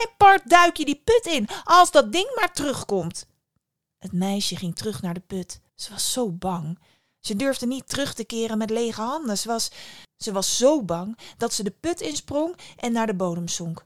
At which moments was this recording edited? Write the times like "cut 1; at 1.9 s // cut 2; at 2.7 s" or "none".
cut 1; at 5.7 s